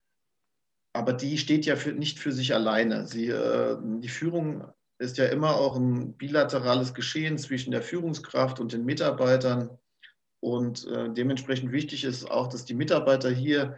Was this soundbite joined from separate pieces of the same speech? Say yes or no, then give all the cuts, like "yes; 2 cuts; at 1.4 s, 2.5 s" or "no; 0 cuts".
no; 0 cuts